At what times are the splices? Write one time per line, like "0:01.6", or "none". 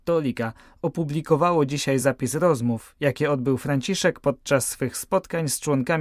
none